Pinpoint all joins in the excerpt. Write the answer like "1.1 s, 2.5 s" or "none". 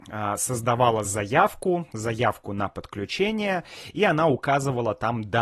none